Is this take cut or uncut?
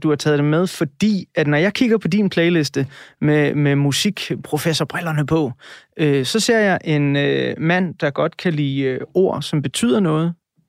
uncut